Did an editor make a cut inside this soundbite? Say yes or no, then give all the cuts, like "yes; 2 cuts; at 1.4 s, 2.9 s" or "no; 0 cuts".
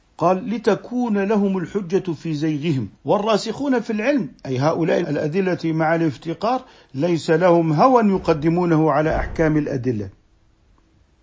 yes; 2 cuts; at 2.9 s, 5.0 s